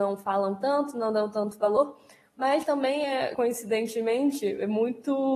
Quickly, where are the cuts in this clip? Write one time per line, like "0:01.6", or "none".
none

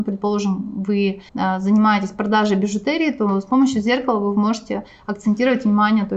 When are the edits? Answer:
0:01.3

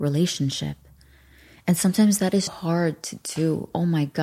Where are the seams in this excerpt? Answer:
0:02.5

